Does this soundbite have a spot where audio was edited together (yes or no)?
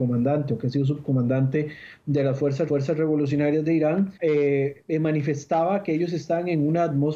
yes